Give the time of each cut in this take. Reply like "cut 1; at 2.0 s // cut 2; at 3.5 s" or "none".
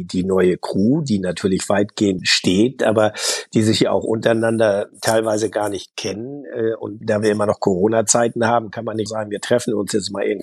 cut 1; at 2.2 s // cut 2; at 7.0 s // cut 3; at 9.1 s

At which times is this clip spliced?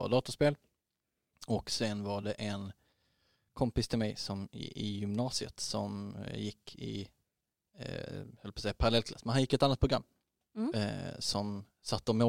none

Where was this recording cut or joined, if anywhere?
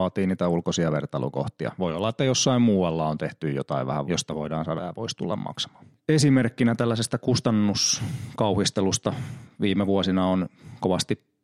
cut 1; at 4.0 s // cut 2; at 4.8 s // cut 3; at 5.9 s

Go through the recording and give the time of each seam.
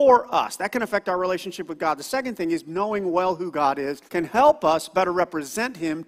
cut 1; at 4.1 s

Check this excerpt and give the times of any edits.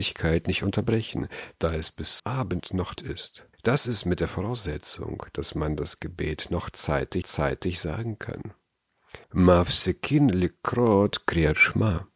cut 1; at 2.2 s // cut 2; at 3.0 s // cut 3; at 3.5 s // cut 4; at 7.2 s // cut 5; at 9.2 s

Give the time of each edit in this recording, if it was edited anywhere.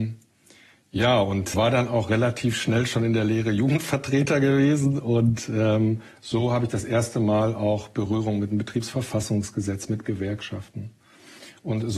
cut 1; at 1.5 s

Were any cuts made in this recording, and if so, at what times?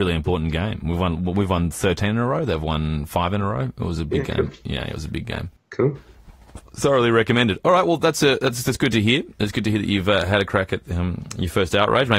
cut 1; at 5.6 s

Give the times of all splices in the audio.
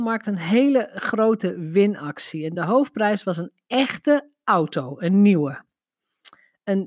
none

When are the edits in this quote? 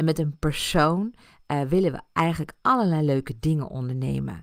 none

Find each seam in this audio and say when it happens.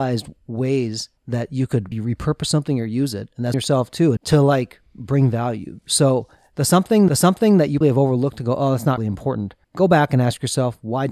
cut 1; at 1.2 s // cut 2; at 1.9 s // cut 3; at 3.5 s // cut 4; at 4.2 s // cut 5; at 7.1 s // cut 6; at 7.8 s // cut 7; at 9.0 s // cut 8; at 9.6 s

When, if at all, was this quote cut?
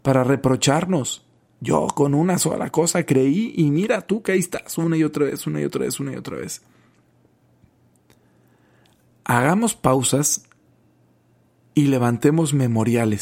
none

